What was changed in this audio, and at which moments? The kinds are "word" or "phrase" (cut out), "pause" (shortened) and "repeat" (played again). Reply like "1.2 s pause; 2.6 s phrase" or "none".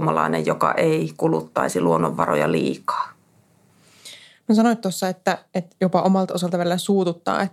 none